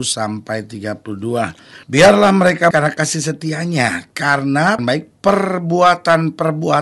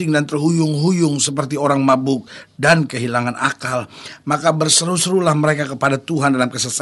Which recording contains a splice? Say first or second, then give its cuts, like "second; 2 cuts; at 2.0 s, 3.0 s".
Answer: first; 3 cuts; at 1.8 s, 2.7 s, 4.8 s